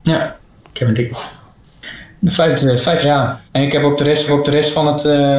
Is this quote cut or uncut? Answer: cut